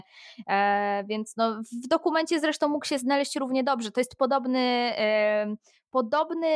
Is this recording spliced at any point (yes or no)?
no